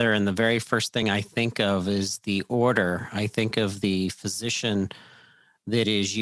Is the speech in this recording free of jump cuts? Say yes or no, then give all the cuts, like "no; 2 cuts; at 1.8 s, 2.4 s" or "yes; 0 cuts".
yes; 0 cuts